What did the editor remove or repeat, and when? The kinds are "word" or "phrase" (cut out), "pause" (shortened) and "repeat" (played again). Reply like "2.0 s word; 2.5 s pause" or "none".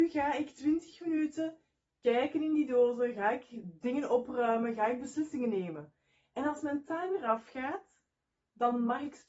none